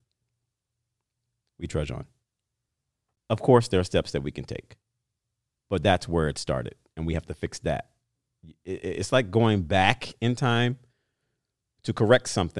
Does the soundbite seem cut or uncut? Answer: uncut